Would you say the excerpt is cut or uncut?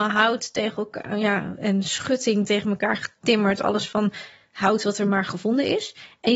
uncut